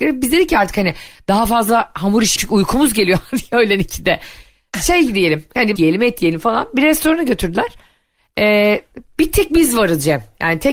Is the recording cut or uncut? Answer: cut